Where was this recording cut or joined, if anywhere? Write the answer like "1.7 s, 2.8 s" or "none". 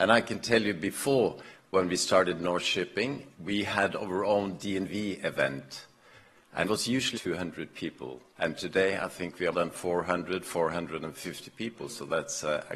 3.3 s, 6.6 s, 7.1 s, 8.3 s, 9.5 s